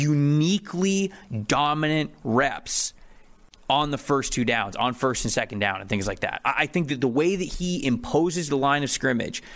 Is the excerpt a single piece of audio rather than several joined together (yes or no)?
yes